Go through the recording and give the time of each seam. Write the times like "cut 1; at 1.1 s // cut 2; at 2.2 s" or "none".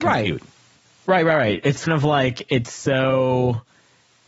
cut 1; at 1.9 s